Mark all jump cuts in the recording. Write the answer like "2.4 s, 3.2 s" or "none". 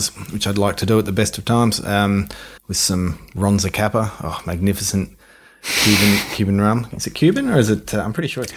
2.6 s, 3.4 s